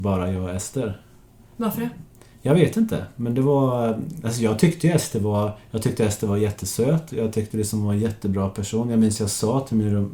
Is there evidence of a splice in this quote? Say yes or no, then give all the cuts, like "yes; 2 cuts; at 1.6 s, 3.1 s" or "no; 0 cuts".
no; 0 cuts